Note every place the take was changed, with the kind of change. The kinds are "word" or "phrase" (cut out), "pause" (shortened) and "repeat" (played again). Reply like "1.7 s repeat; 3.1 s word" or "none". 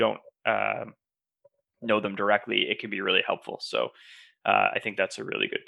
none